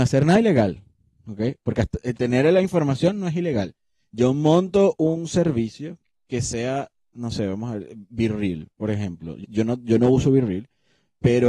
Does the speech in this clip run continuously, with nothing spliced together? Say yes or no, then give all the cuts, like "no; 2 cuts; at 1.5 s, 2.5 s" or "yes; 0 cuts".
no; 1 cut; at 9.4 s